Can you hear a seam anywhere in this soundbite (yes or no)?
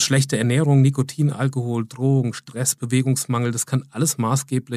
no